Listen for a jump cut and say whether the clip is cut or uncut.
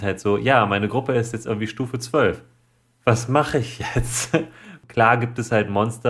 uncut